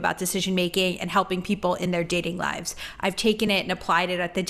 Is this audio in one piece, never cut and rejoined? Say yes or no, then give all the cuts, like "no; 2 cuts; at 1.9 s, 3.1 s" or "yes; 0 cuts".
yes; 0 cuts